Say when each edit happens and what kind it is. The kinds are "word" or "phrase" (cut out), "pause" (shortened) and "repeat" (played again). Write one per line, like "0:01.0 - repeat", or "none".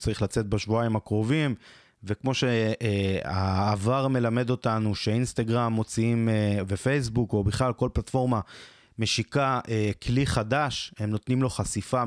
none